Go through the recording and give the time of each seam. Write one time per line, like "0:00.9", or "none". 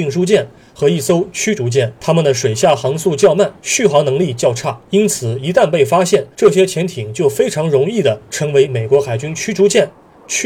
0:02.0
0:03.6
0:04.9
0:06.3